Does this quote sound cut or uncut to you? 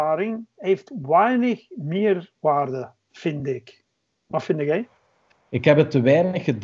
uncut